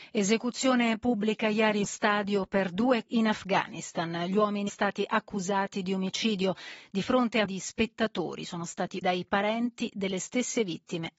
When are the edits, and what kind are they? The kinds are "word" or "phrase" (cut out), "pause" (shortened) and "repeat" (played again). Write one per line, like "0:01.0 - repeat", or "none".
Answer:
0:01.8 - word
0:03.1 - word
0:04.7 - word
0:07.5 - word
0:09.0 - word